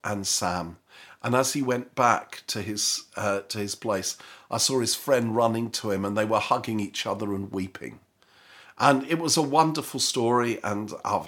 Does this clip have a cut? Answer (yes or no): no